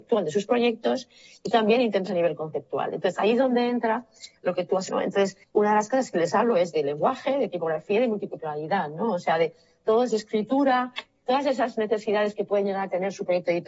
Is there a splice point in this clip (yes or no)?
yes